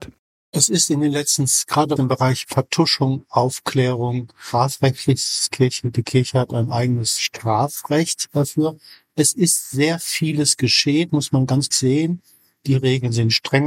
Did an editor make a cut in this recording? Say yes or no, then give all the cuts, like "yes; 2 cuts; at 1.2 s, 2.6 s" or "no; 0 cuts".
yes; 4 cuts; at 2.0 s, 2.4 s, 11.1 s, 11.7 s